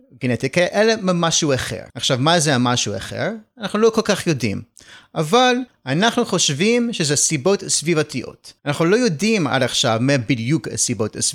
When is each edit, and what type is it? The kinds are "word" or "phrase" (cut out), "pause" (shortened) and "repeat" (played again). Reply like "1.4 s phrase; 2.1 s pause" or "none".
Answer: 1.9 s pause; 8.6 s pause